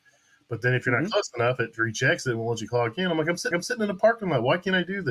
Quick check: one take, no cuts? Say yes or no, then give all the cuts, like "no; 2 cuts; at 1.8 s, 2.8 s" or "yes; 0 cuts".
no; 1 cut; at 3.5 s